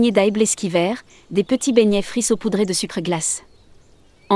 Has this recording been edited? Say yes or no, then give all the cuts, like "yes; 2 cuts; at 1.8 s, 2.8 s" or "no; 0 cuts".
no; 0 cuts